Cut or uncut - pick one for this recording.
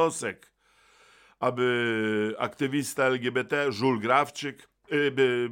uncut